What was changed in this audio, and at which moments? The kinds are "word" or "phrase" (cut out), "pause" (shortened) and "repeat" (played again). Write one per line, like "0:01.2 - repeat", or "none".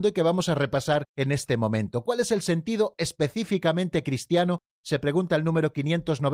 0:01.1 - pause